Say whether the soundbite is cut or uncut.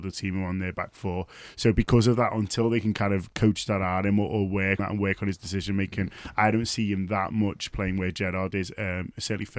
cut